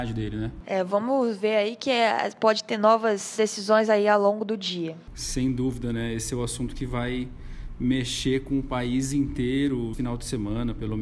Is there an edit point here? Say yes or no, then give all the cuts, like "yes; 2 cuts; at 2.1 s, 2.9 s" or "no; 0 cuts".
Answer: yes; 1 cut; at 9.9 s